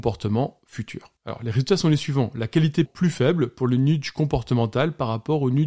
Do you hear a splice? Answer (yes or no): yes